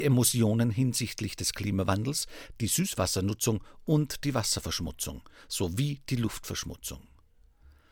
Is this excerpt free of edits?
yes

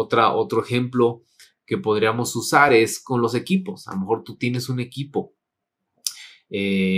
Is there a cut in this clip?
no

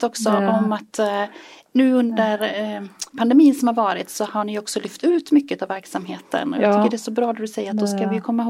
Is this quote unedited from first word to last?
yes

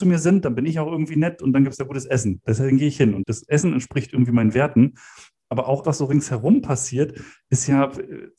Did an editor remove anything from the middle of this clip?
yes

